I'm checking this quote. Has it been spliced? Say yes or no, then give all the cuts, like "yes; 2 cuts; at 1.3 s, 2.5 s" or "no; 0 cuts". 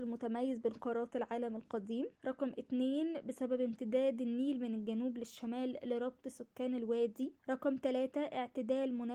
yes; 2 cuts; at 2.2 s, 7.4 s